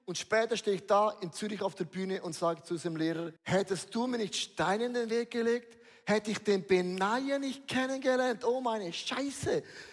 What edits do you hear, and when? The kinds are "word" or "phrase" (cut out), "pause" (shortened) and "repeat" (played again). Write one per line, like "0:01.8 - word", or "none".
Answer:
0:03.4 - pause